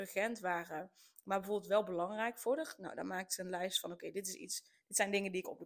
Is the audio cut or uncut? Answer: uncut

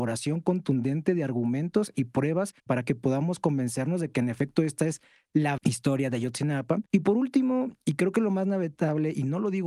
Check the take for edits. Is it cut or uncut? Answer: cut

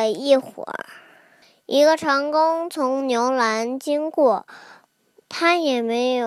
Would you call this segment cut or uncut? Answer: uncut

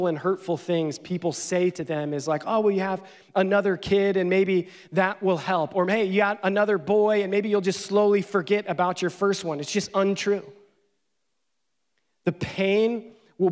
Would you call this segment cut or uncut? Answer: uncut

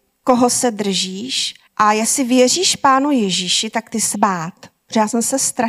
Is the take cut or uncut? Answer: cut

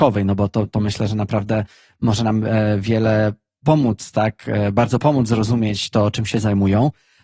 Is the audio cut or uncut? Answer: uncut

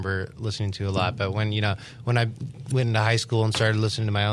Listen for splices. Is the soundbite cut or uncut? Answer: uncut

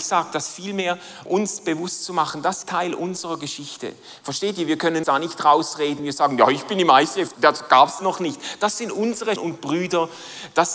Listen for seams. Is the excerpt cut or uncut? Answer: cut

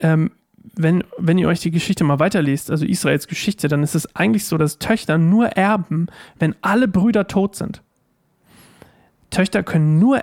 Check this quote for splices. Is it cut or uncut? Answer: uncut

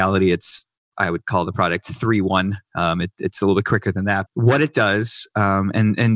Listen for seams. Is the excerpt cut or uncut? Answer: cut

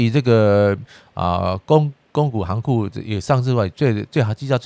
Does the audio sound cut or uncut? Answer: uncut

